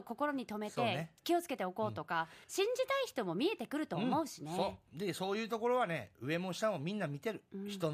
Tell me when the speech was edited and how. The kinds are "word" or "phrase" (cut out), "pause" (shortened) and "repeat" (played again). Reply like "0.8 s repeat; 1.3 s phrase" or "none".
2.4 s pause